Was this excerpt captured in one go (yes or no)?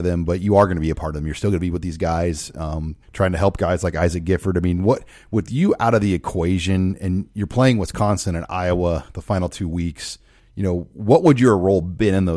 no